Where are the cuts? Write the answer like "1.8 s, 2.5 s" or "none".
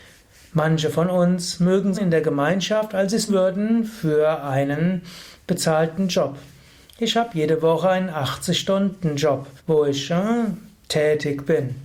1.9 s, 3.3 s, 9.6 s

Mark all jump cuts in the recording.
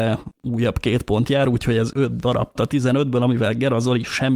1.9 s, 2.6 s

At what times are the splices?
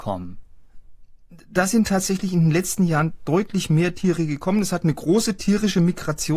none

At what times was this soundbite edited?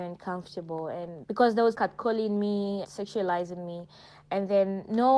1.2 s, 1.7 s, 2.8 s

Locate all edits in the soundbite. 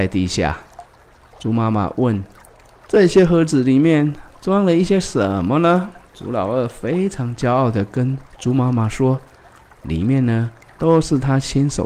6.1 s, 8.3 s

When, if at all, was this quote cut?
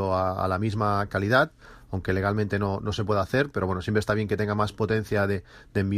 none

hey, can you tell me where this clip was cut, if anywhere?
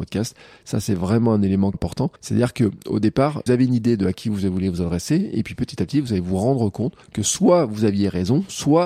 1.7 s, 2.2 s, 3.5 s, 7.0 s

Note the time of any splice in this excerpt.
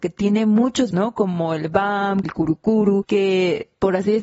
0.9 s, 2.2 s, 3.0 s

